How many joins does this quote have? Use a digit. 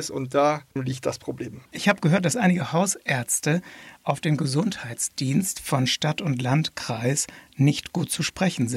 1